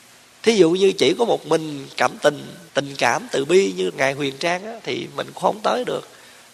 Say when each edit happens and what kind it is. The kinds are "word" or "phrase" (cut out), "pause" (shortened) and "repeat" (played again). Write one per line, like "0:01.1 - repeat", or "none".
0:02.7 - pause
0:03.9 - word